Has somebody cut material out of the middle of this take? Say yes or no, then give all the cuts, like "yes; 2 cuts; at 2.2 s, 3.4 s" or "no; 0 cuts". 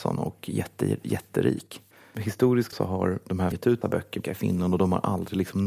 yes; 4 cuts; at 2.7 s, 3.5 s, 3.8 s, 4.2 s